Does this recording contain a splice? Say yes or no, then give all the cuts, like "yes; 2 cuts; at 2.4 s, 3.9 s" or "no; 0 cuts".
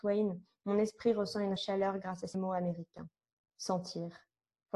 yes; 2 cuts; at 1.6 s, 2.3 s